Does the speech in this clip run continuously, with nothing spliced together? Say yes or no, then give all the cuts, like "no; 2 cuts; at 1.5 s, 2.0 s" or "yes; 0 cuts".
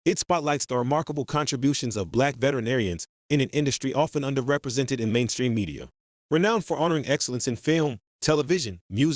yes; 0 cuts